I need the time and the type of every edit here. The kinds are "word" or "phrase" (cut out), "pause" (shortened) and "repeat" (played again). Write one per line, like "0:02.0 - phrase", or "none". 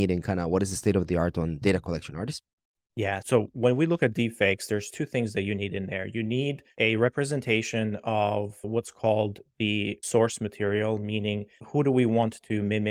none